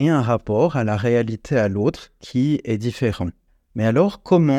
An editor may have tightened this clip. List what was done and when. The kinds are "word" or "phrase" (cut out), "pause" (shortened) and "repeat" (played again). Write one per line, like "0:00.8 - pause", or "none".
0:03.5 - pause